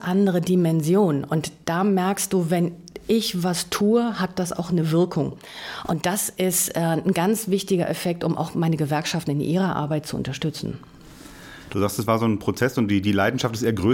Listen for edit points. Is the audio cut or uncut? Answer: uncut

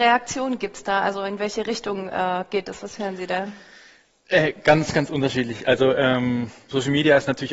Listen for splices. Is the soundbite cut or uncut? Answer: uncut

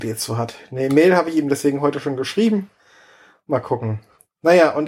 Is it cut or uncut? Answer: uncut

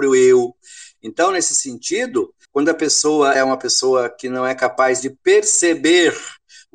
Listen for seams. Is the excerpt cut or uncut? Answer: cut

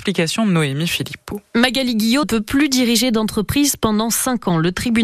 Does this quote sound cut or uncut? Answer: cut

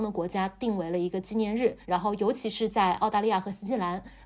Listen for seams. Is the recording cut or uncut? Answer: cut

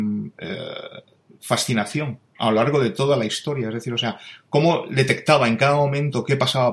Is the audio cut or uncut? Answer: uncut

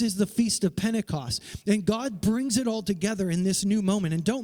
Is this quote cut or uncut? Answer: uncut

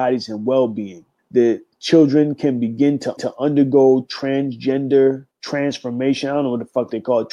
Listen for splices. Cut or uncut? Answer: cut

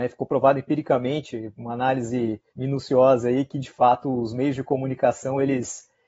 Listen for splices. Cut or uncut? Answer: cut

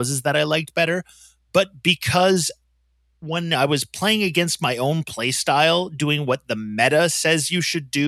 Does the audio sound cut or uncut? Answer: uncut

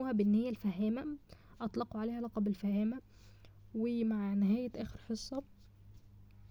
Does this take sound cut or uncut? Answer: uncut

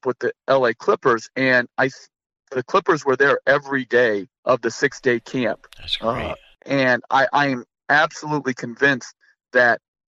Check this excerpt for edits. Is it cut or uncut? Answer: cut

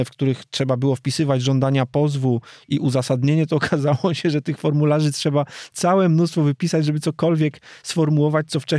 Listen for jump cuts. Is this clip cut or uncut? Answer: uncut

